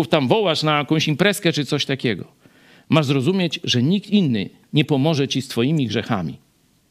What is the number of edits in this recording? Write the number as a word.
zero